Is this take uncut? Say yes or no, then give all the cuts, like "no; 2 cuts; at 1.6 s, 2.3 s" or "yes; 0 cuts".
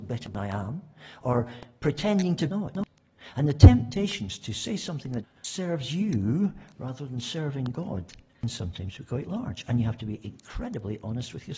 no; 3 cuts; at 2.5 s, 5.2 s, 8.3 s